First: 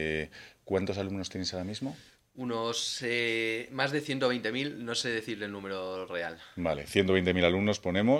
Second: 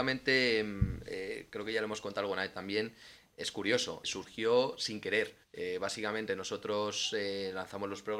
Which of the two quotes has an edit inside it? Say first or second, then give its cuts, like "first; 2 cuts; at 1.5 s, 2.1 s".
second; 2 cuts; at 4.0 s, 5.4 s